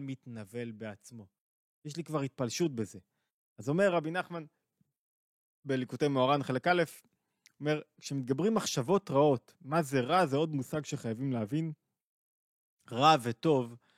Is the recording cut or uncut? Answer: uncut